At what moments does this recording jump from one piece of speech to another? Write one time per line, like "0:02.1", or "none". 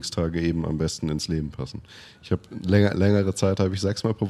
none

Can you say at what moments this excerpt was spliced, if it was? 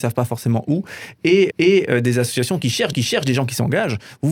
0:01.5
0:02.9

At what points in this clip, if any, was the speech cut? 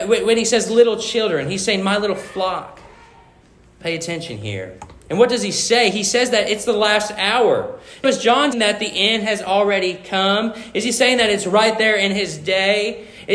0:08.0
0:08.5

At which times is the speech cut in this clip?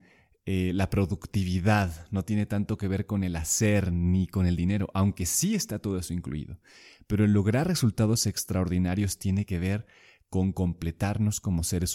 none

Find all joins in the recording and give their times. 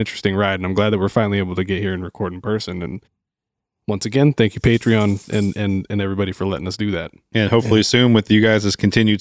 none

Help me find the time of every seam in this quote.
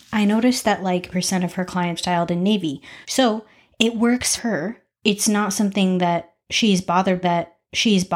0:01.1
0:02.0
0:03.0
0:04.4
0:07.2

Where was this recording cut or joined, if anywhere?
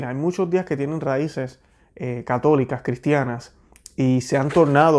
none

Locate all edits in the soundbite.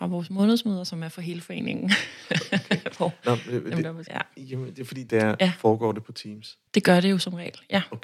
0:04.1
0:05.1
0:06.7

